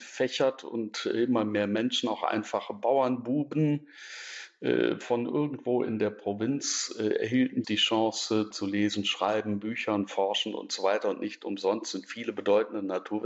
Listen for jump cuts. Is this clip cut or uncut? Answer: cut